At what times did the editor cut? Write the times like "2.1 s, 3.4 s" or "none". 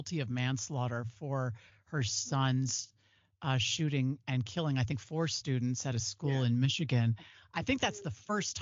none